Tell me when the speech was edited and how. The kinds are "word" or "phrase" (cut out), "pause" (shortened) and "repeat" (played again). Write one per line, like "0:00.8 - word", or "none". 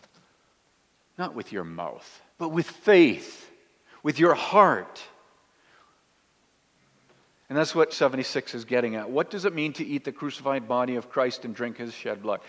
0:02.3 - pause
0:07.9 - word

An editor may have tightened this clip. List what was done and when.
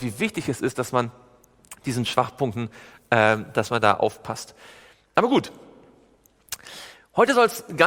none

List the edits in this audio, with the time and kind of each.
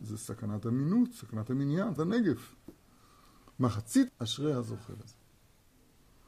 0:02.0 - word
0:04.1 - phrase

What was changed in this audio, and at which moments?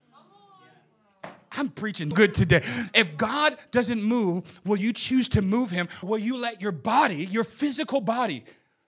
0:02.1 - word
0:06.0 - word

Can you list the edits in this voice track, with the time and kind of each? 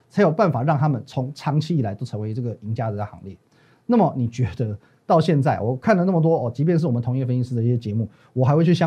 none

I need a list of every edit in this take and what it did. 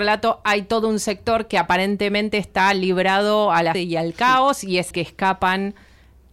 0:03.7 - word
0:04.9 - word

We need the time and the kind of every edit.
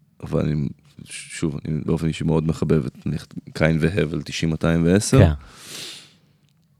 0:01.8 - word

